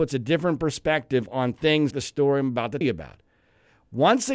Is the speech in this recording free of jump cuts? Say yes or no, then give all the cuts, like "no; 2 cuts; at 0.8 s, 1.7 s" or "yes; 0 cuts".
no; 2 cuts; at 1.9 s, 2.8 s